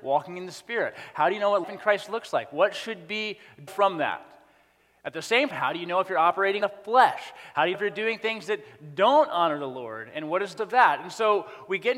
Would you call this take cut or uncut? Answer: cut